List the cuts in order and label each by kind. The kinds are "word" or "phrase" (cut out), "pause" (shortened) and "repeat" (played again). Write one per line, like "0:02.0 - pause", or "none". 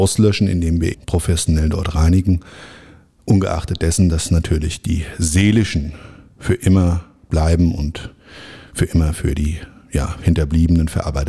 0:00.9 - word

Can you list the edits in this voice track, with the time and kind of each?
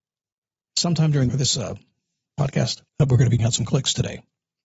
0:01.3 - phrase
0:02.9 - pause
0:03.4 - word

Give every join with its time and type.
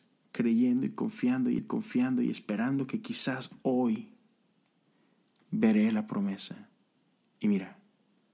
0:01.6 - repeat

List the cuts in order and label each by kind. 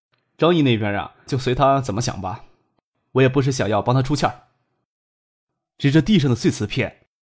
0:01.3 - word

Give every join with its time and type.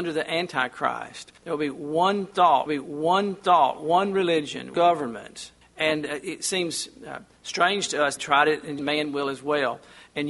0:01.4 - pause
0:02.7 - repeat
0:04.7 - phrase
0:05.6 - pause
0:08.2 - word
0:08.8 - phrase

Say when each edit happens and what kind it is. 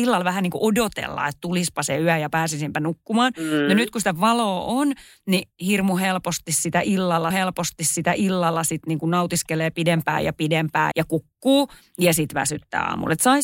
0:07.3 - repeat
0:10.9 - word

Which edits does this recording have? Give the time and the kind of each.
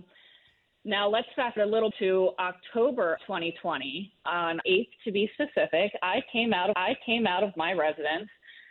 0:01.6 - word
0:01.9 - word
0:03.2 - word
0:04.6 - word
0:06.7 - repeat

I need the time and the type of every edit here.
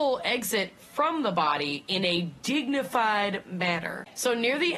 none

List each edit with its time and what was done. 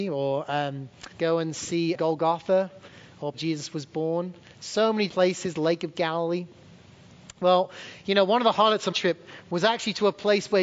0:01.1 - pause
0:01.9 - word
0:03.3 - phrase
0:04.4 - pause
0:05.1 - word
0:08.9 - word

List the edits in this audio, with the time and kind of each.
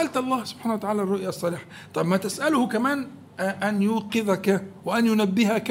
none

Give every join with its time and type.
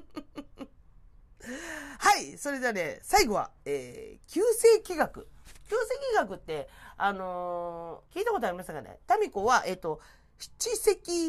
0:08.1 - pause

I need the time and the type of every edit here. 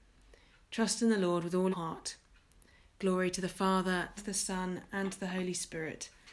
0:01.7 - word
0:04.2 - word

